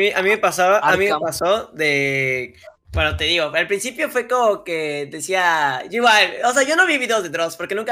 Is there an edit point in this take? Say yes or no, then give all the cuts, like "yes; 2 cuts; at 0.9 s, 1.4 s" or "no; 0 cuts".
yes; 1 cut; at 2.8 s